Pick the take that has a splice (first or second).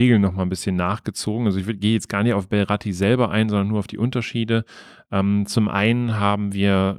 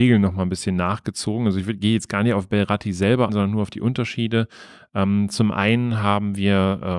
second